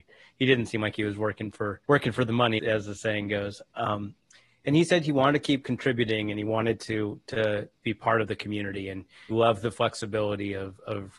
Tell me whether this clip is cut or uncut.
cut